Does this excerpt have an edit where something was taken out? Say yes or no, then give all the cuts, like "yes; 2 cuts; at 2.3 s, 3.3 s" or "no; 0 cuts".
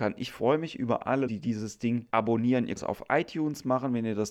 yes; 3 cuts; at 1.3 s, 2.1 s, 2.8 s